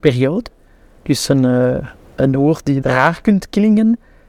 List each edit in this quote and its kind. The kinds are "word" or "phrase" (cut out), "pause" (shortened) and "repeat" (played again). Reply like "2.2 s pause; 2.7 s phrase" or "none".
2.2 s word; 2.8 s word